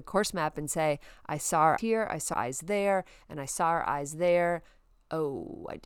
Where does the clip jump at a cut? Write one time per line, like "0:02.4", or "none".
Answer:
0:01.8
0:02.3